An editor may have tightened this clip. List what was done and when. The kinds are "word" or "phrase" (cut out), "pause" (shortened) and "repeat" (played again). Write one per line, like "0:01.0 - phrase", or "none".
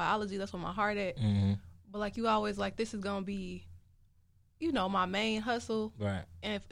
none